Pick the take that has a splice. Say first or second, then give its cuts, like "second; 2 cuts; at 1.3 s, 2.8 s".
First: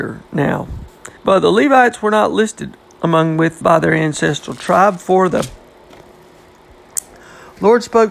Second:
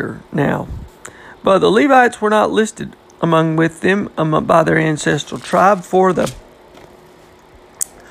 first; 2 cuts; at 1.2 s, 3.6 s